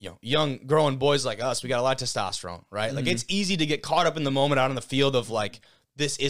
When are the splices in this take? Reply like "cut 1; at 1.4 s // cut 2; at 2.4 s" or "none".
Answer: none